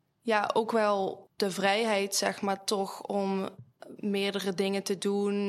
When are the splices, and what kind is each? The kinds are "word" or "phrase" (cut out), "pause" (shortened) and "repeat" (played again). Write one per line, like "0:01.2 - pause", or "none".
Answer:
0:01.3 - pause